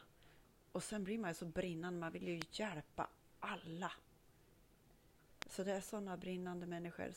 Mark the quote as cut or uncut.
uncut